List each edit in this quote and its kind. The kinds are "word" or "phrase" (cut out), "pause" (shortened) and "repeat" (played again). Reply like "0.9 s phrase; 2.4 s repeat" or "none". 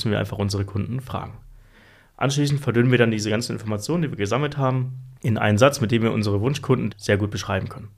5.2 s pause; 6.9 s word